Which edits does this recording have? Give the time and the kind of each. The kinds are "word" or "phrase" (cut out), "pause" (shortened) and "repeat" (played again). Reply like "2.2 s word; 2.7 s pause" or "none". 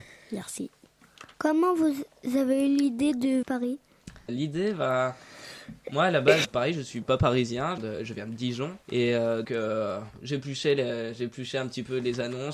1.3 s pause; 3.4 s phrase; 4.3 s word; 6.4 s word; 7.8 s phrase; 8.8 s pause; 9.4 s word

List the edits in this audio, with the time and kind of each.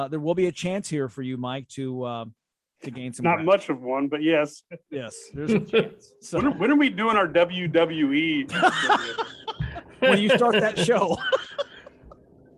2.5 s pause

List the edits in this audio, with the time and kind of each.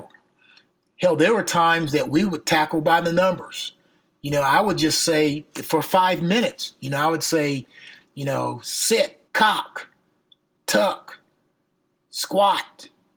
9.3 s pause

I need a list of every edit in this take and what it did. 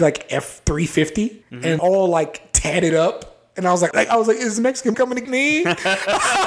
1.4 s pause; 1.8 s phrase; 3.9 s word; 4.9 s word; 5.2 s word

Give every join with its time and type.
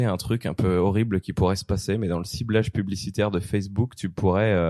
none

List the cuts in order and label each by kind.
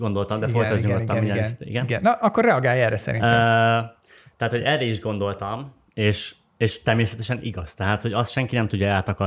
none

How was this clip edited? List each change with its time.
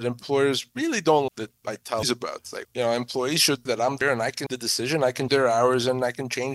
1.3 s word; 2.0 s word; 2.6 s word; 3.7 s word; 4.0 s word; 4.5 s word; 5.3 s word

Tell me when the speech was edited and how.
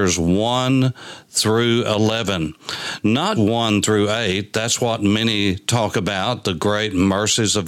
3.4 s word

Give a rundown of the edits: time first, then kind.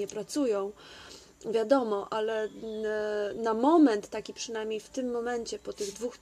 none

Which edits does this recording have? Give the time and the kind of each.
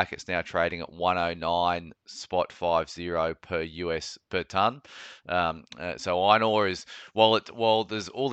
none

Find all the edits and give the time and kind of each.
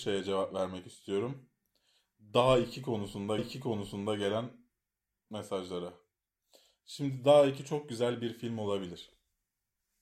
3.4 s repeat

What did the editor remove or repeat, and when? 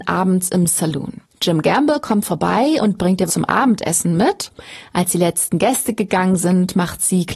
1.2 s pause; 3.3 s word

